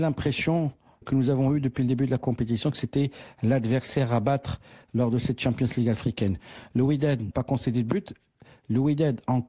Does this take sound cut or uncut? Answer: cut